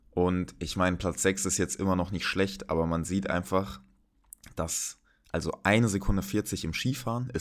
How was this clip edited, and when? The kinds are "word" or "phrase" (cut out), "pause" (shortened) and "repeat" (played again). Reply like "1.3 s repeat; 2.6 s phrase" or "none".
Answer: none